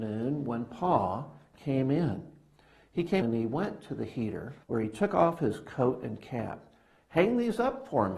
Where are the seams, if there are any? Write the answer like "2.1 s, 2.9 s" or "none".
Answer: 3.2 s, 4.6 s